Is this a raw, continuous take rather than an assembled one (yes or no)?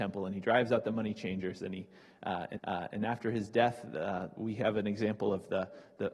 no